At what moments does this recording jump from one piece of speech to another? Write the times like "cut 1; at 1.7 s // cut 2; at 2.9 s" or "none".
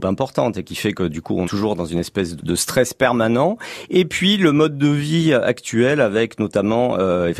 cut 1; at 1.4 s // cut 2; at 2.4 s